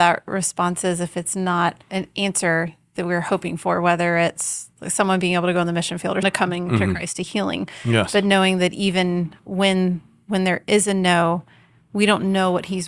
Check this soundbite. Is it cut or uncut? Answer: cut